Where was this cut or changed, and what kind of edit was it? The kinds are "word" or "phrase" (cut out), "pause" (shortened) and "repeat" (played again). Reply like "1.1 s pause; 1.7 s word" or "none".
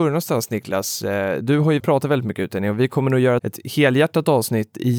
1.8 s word; 3.4 s word

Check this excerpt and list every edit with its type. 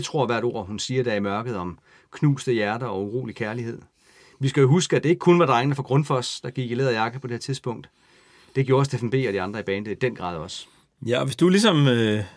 none

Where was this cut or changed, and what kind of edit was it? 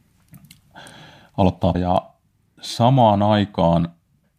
1.7 s phrase

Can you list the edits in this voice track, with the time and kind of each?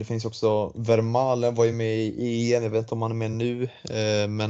none

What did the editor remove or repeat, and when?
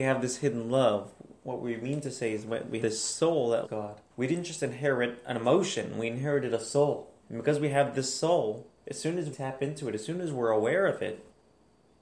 2.8 s word; 3.6 s word; 4.1 s pause; 7.2 s pause; 8.8 s pause; 9.3 s word

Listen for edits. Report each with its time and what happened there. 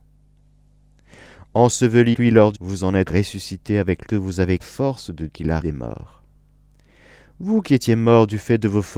2.1 s word; 2.5 s word; 3.1 s word; 4.1 s phrase; 4.6 s phrase; 5.3 s word; 5.6 s word

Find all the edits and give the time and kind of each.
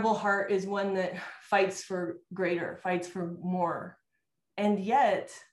none

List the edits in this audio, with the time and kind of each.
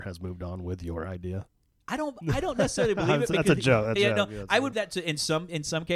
4.0 s word; 4.7 s word

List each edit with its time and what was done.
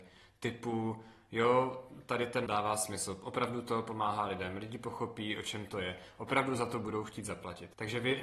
2.5 s word

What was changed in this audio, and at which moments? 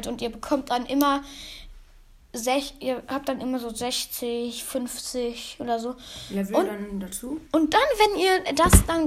7.5 s pause

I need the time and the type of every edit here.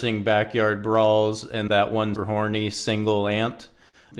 1.7 s word; 2.2 s word

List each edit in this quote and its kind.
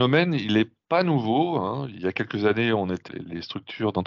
1.9 s phrase; 3.1 s word

